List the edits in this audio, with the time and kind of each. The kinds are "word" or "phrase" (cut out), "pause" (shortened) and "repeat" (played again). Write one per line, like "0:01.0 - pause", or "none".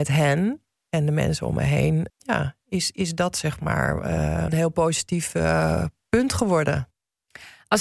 0:02.1 - word
0:04.5 - phrase